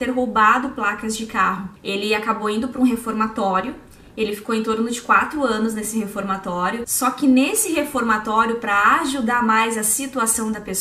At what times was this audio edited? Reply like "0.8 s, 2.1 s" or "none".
none